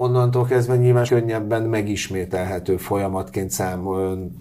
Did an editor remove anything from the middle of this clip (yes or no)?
yes